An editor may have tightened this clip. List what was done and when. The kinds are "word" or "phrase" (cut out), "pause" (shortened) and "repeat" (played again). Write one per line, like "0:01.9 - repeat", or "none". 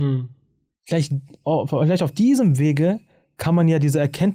none